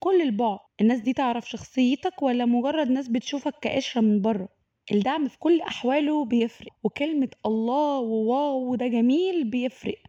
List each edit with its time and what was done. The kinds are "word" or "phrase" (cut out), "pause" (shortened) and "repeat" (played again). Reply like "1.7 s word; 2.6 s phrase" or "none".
none